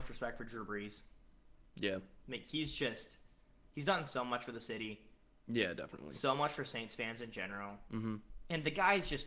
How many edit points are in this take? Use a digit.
0